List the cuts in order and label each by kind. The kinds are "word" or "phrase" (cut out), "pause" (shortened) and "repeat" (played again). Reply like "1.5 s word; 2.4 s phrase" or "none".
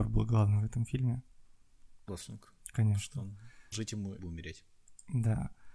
2.1 s word; 3.7 s word; 4.2 s word